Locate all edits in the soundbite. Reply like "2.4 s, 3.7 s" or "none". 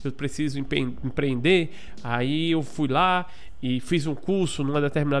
none